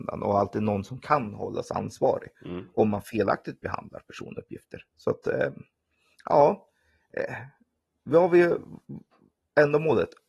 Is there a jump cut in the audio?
no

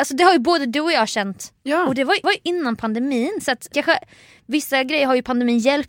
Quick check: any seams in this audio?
yes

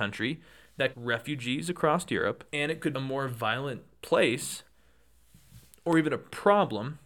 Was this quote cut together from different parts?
yes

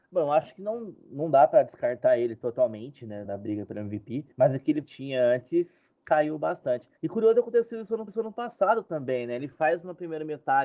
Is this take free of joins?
no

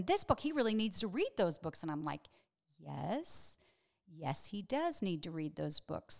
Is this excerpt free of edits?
yes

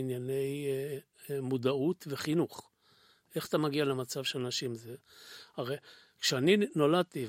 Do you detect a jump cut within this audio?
no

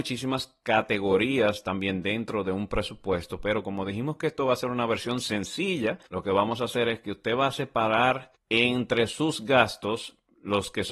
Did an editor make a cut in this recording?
yes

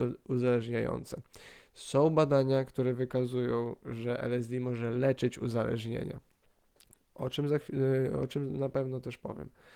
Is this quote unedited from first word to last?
yes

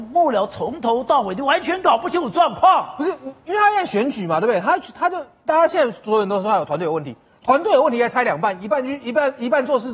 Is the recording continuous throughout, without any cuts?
yes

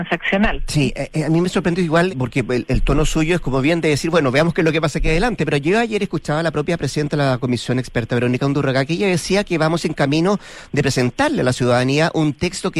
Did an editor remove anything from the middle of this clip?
yes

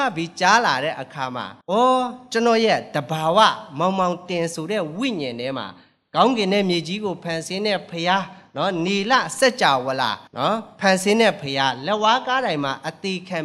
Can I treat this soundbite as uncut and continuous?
no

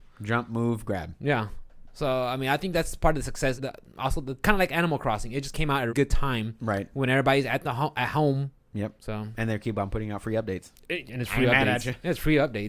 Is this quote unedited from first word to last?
no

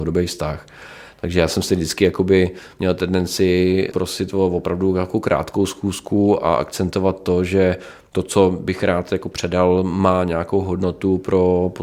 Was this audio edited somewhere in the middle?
no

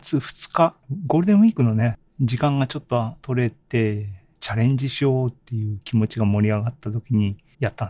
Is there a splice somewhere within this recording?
no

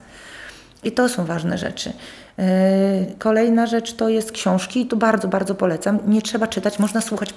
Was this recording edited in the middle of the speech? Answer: no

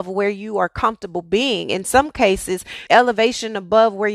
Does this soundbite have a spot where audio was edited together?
yes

